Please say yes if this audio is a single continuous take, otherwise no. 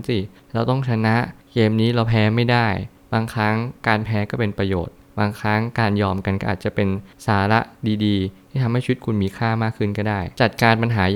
yes